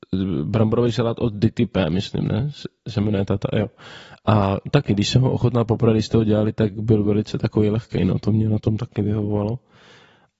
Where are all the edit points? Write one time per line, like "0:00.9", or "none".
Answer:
none